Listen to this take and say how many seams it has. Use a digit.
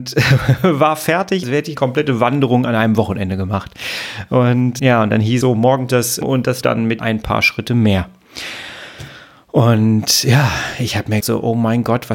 9